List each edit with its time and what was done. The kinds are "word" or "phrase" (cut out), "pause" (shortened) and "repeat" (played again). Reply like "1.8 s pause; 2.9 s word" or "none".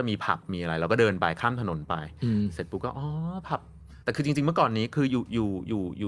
4.0 s pause